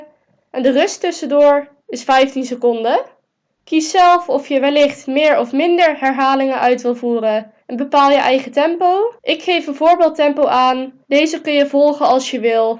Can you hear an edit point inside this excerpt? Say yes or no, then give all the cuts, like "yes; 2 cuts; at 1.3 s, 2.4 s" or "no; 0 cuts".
yes; 4 cuts; at 3.4 s, 7.6 s, 9.2 s, 11.0 s